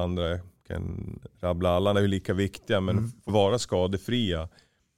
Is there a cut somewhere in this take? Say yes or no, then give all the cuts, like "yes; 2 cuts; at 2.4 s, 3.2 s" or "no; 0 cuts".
yes; 2 cuts; at 1.9 s, 3.3 s